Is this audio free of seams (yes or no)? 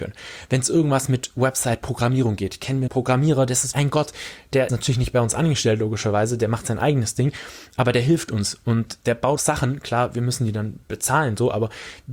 no